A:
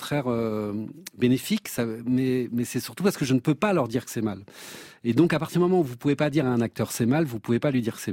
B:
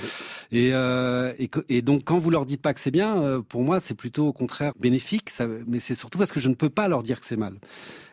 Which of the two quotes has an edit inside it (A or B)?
B